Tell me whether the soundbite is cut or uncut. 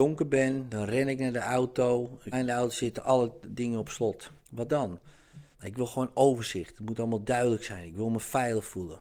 cut